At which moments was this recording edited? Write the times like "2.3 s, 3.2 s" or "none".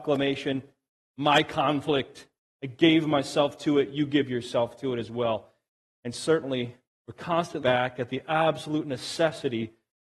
6.8 s, 7.6 s